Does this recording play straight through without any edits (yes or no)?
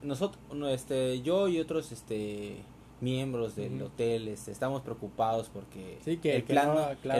yes